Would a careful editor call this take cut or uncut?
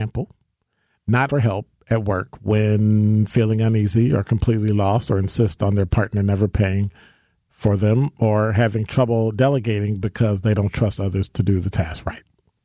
cut